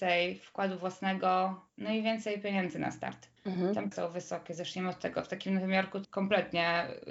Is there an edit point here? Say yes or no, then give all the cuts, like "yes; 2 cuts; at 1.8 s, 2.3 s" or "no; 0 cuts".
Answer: yes; 4 cuts; at 1.7 s, 3.4 s, 3.9 s, 6.0 s